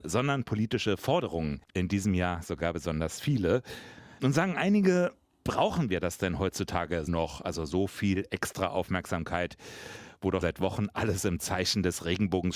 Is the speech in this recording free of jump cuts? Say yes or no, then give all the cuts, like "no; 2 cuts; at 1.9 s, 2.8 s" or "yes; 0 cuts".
no; 2 cuts; at 7.1 s, 10.4 s